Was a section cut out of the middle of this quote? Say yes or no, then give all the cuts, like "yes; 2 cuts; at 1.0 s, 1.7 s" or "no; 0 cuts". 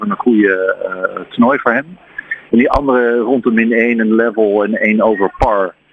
no; 0 cuts